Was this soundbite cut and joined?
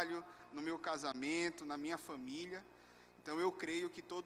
no; 0 cuts

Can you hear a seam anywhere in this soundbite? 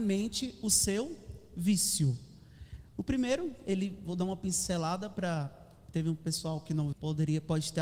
yes; 1 cut; at 6.9 s

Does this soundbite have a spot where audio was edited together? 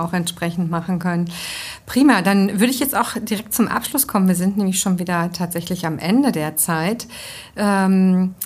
no; 0 cuts

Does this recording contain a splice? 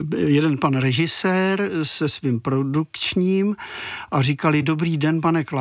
no; 0 cuts

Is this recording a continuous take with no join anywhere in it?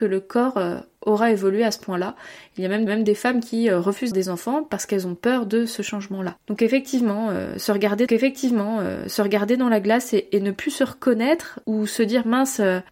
no; 4 cuts; at 2.9 s, 4.1 s, 8.1 s, 11.6 s

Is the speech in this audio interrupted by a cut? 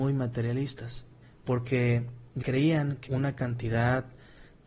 yes; 3 cuts; at 1.2 s, 2.4 s, 3.1 s

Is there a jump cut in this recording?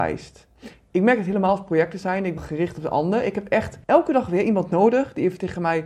yes; 2 cuts; at 2.4 s, 3.8 s

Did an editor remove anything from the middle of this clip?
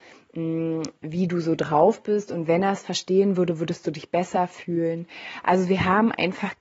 no; 0 cuts

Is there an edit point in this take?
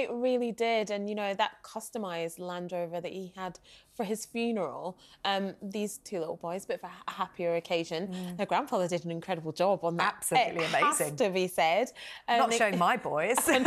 no; 0 cuts

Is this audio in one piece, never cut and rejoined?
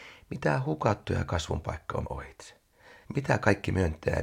no; 2 cuts; at 2.0 s, 3.0 s

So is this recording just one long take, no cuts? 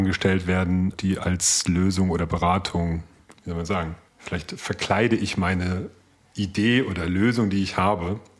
no; 3 cuts; at 0.9 s, 3.3 s, 4.1 s

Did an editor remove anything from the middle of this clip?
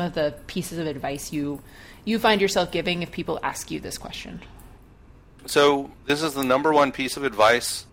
yes; 1 cut; at 6.0 s

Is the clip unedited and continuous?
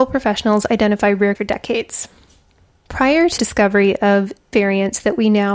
no; 3 cuts; at 1.3 s, 3.4 s, 4.5 s

